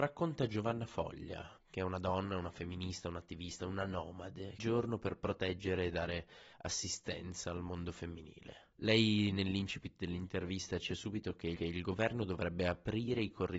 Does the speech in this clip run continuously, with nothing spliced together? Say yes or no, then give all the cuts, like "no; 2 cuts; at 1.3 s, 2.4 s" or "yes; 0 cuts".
no; 6 cuts; at 1.6 s, 4.6 s, 6.5 s, 8.7 s, 10.9 s, 11.6 s